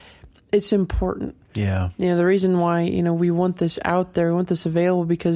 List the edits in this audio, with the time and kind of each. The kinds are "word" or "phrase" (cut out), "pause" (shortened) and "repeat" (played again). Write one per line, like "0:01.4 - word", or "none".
none